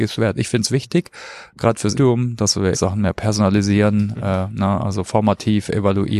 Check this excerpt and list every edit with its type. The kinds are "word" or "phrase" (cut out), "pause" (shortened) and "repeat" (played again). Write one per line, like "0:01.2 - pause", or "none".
0:01.9 - word
0:02.7 - word